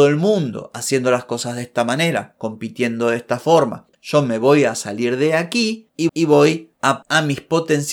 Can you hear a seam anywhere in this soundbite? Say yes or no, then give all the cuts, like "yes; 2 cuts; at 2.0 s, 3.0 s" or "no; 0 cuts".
yes; 2 cuts; at 6.1 s, 7.0 s